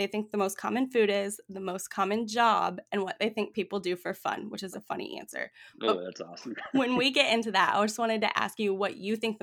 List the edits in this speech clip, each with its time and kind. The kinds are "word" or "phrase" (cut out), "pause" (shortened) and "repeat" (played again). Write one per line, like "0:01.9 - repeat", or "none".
0:04.7 - word